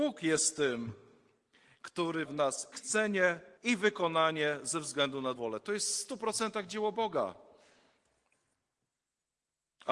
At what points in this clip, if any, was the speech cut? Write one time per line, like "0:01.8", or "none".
0:02.3
0:02.7
0:03.6
0:05.4